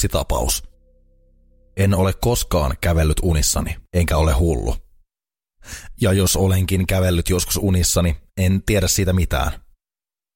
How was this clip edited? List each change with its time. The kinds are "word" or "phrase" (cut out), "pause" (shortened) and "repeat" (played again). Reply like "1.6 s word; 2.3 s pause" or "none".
3.8 s pause